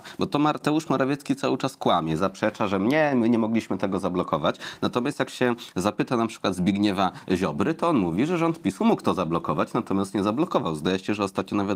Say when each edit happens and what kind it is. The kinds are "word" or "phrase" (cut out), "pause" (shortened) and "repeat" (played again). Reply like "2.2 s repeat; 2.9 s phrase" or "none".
none